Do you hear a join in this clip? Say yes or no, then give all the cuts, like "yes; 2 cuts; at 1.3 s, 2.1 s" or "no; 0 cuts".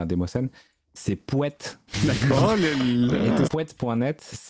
yes; 2 cuts; at 1.9 s, 3.5 s